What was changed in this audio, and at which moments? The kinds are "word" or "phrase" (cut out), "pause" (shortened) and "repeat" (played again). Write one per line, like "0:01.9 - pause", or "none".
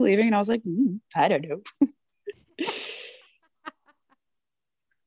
none